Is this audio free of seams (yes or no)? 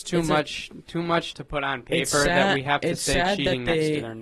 no